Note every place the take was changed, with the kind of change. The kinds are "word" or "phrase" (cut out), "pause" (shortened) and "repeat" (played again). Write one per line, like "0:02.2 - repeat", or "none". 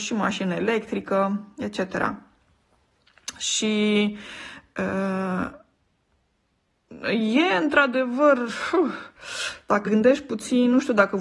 0:09.8 - word